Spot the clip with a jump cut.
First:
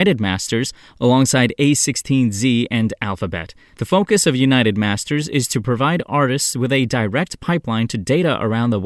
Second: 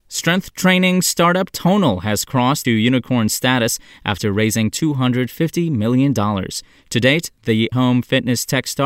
second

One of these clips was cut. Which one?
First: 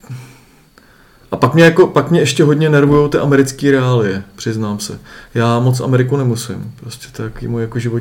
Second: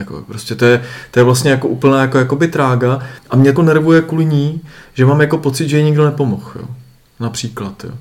second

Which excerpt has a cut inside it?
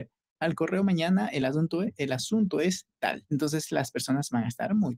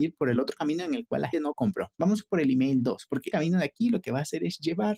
second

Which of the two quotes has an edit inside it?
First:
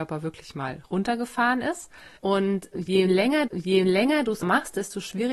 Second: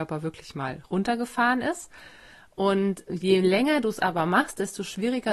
first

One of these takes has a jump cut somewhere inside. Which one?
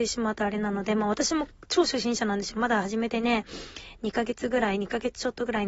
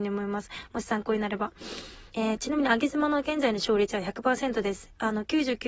second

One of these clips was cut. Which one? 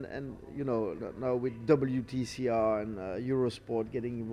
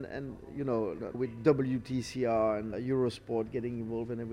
second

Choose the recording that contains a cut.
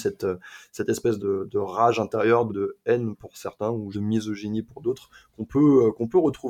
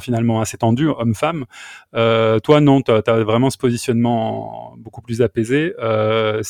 first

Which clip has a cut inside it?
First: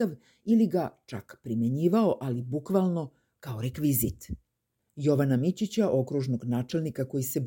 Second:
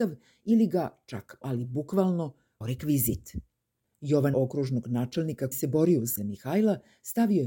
second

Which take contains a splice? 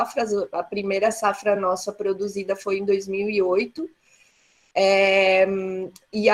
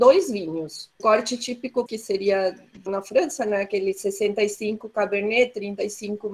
second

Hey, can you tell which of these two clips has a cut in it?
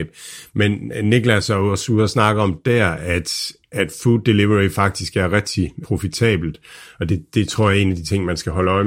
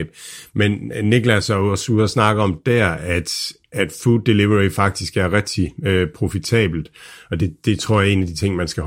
first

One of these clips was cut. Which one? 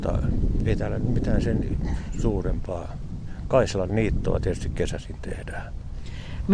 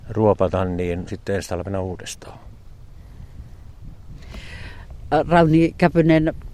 second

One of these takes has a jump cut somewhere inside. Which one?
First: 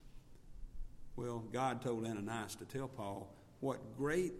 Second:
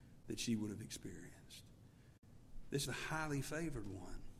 second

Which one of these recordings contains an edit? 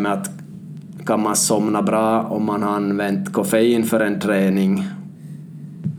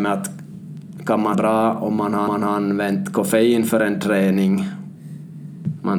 second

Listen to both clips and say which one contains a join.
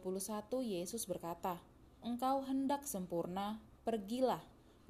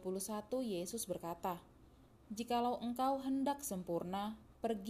first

